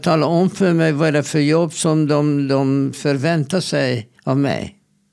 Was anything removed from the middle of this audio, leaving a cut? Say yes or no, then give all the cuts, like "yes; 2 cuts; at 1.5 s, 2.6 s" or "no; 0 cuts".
yes; 1 cut; at 4.2 s